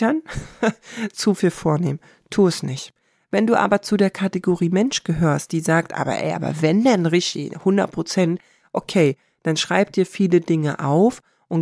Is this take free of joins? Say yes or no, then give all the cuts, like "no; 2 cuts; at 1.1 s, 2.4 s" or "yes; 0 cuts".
yes; 0 cuts